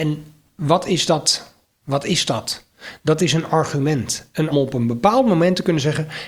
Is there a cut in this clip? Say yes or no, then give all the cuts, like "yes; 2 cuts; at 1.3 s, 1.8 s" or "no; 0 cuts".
yes; 1 cut; at 4.5 s